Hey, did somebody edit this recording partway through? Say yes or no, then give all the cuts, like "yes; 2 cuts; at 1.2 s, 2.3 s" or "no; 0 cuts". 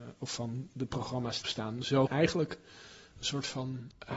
yes; 2 cuts; at 1.4 s, 2.1 s